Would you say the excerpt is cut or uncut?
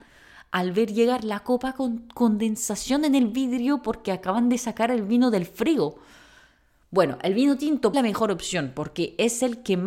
cut